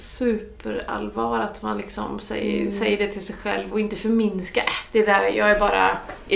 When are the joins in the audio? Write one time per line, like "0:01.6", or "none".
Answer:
none

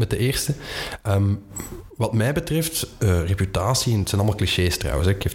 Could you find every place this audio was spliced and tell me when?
none

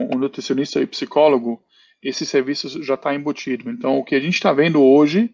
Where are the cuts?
none

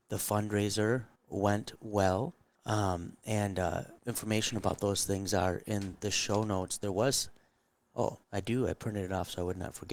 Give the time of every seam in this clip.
0:01.2
0:02.5
0:04.0
0:08.2

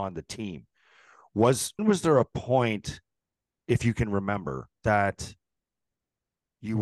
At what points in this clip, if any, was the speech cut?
0:01.8
0:03.2
0:04.8

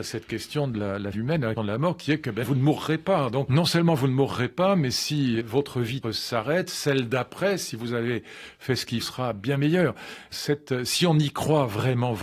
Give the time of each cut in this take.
0:01.1
0:01.6
0:02.4
0:03.5
0:05.4
0:06.0
0:09.0
0:10.3

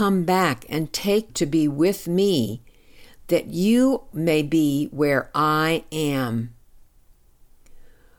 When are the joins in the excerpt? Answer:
0:01.3
0:04.1

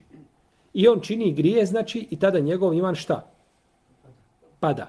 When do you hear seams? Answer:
none

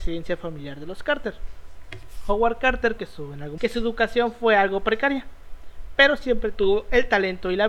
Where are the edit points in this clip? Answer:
0:03.0
0:03.6

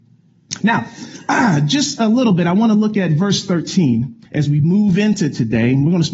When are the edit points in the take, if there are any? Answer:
0:04.3

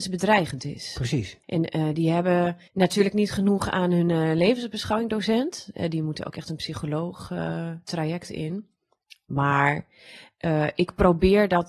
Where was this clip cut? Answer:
0:01.4
0:02.7

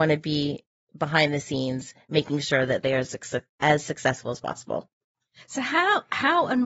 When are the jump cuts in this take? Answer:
none

